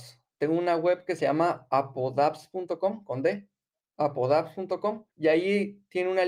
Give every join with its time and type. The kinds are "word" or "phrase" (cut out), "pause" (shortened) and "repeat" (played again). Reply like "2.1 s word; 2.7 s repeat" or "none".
5.1 s pause